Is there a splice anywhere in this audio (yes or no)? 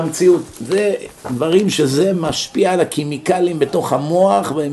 no